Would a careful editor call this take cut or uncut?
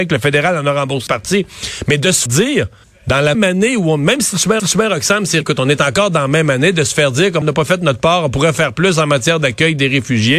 cut